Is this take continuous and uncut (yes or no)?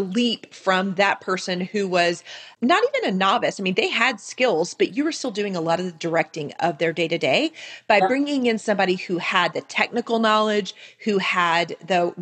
yes